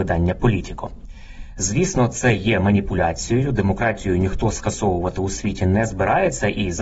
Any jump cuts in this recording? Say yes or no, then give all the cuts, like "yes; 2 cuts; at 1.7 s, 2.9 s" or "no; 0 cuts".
no; 0 cuts